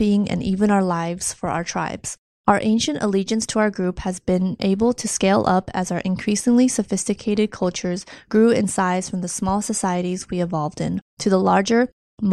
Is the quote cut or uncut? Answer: cut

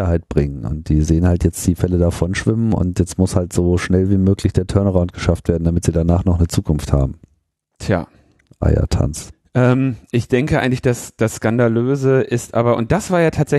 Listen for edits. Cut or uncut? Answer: uncut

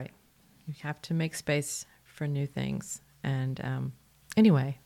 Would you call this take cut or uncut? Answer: uncut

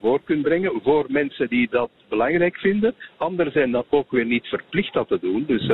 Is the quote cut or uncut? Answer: uncut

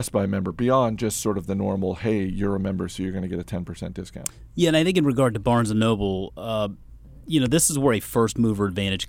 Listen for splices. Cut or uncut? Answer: uncut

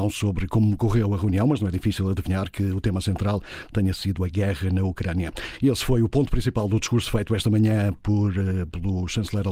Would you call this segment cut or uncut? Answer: uncut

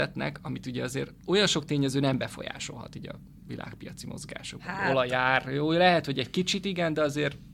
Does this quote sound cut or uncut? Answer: uncut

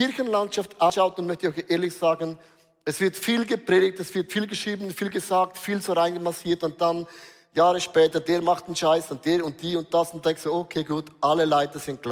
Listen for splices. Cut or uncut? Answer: uncut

